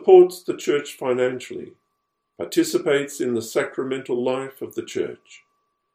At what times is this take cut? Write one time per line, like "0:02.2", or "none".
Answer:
none